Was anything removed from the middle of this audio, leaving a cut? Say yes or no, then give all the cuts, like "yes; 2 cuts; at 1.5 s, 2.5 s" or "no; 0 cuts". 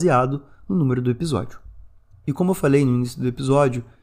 no; 0 cuts